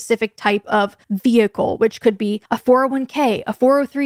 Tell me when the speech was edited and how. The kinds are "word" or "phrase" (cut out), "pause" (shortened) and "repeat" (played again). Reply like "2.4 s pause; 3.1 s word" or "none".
1.0 s pause; 2.4 s pause